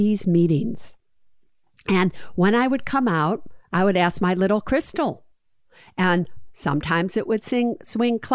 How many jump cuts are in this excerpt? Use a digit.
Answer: 0